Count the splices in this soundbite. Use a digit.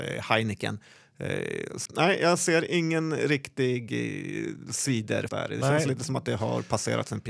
2